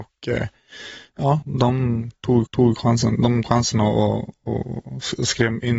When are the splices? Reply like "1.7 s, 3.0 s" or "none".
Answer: 1.4 s, 2.5 s, 3.4 s